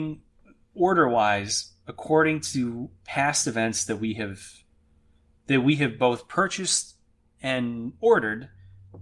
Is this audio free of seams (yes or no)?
yes